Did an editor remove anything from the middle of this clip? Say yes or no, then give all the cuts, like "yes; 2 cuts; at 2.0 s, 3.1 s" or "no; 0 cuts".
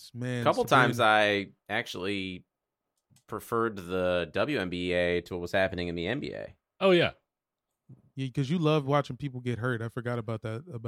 yes; 1 cut; at 1.6 s